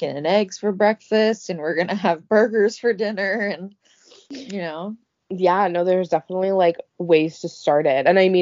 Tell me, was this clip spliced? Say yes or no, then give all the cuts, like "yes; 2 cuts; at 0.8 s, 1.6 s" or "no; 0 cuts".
no; 0 cuts